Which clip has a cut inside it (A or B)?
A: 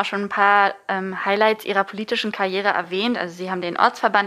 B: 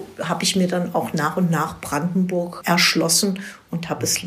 B